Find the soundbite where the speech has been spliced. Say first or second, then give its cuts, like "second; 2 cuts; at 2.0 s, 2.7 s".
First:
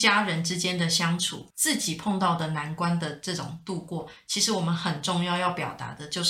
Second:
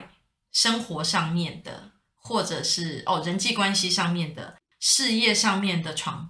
first; 1 cut; at 1.5 s